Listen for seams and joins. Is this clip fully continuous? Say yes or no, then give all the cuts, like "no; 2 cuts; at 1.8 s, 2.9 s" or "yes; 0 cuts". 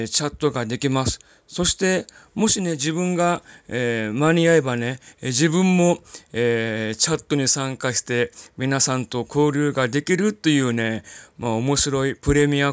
yes; 0 cuts